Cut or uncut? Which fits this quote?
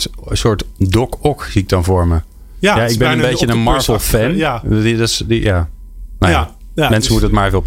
uncut